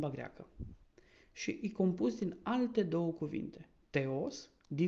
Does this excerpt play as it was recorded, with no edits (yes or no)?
yes